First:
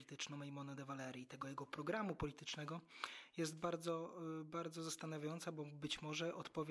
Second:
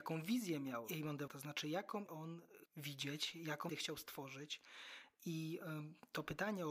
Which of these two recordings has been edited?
second; 4 cuts; at 1.3 s, 2.1 s, 2.7 s, 3.7 s

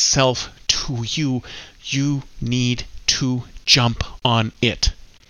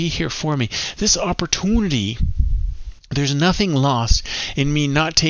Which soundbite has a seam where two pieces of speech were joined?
second; 1 cut; at 3.0 s

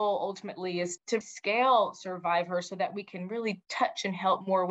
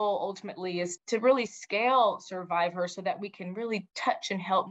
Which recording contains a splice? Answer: first; 1 cut; at 1.2 s

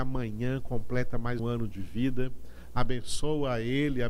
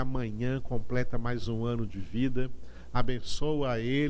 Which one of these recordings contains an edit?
first; 1 cut; at 1.4 s

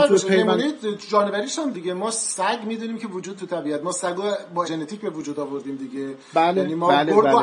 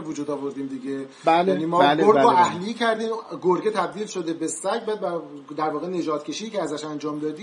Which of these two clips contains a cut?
first; 3 cuts; at 1.7 s, 3.4 s, 4.6 s

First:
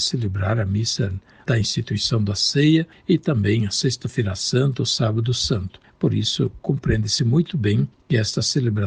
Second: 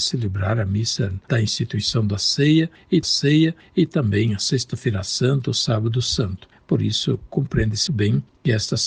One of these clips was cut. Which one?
second; 3 cuts; at 1.2 s, 3.0 s, 7.9 s

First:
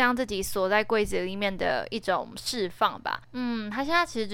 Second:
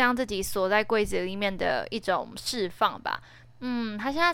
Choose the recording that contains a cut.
first; 1 cut; at 3.2 s

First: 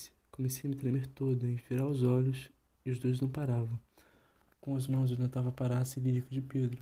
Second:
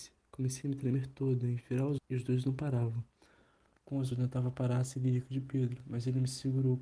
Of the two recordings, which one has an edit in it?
second; 2 cuts; at 2.0 s, 4.1 s

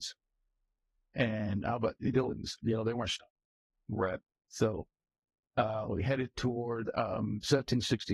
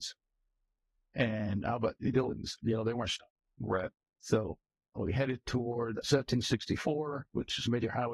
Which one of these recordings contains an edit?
second; 3 cuts; at 3.4 s, 5.0 s, 6.0 s

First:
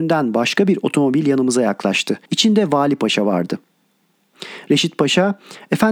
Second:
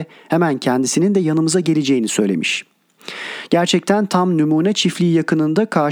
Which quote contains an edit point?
first; 1 cut; at 2.2 s

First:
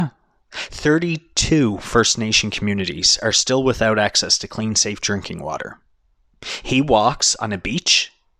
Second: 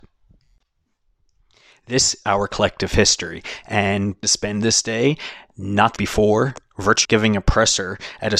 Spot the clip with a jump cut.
second; 4 cuts; at 2.2 s, 4.2 s, 6.0 s, 7.0 s

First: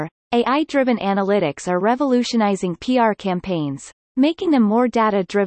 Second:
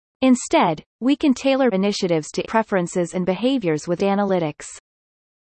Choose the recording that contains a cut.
second; 3 cuts; at 1.7 s, 2.4 s, 4.0 s

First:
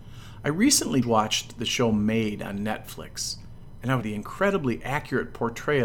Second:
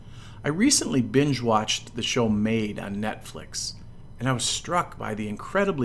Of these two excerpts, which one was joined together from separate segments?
first; 2 cuts; at 1.0 s, 4.0 s

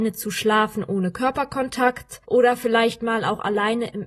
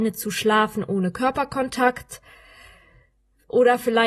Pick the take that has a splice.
first; 1 cut; at 2.2 s

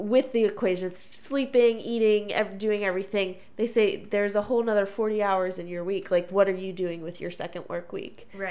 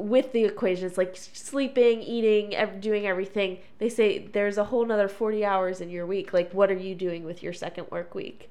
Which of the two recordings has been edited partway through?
first; 1 cut; at 1.0 s

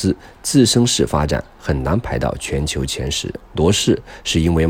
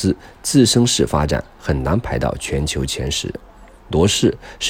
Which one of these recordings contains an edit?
first; 1 cut; at 3.4 s

